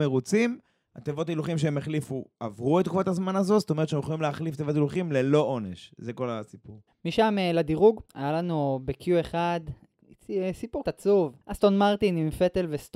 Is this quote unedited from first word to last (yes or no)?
no